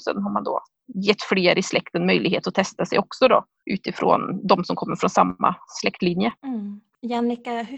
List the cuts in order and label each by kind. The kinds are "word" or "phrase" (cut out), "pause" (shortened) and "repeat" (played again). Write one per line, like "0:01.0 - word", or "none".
0:06.4 - pause